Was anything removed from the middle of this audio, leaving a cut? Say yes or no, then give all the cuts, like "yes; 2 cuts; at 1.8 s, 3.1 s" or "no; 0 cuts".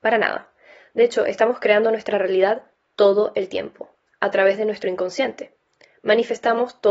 no; 0 cuts